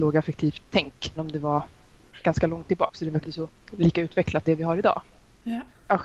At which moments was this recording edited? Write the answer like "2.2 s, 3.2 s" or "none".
1.2 s, 3.2 s, 4.4 s